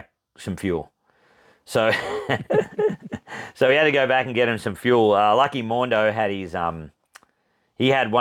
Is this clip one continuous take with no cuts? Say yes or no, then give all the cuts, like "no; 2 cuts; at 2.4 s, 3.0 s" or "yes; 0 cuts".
yes; 0 cuts